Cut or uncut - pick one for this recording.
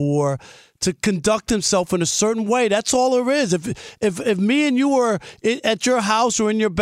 uncut